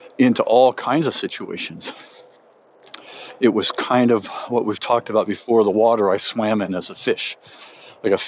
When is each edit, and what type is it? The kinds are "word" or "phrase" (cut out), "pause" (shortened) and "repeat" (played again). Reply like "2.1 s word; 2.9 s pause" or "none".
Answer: none